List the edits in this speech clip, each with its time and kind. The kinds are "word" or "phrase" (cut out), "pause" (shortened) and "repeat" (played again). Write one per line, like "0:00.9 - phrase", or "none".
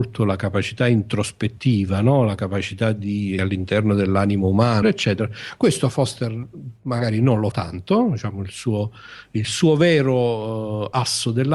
0:03.4 - word
0:04.8 - word
0:07.5 - word